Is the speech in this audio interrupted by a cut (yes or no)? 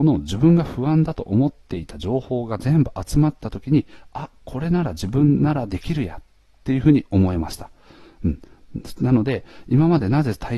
no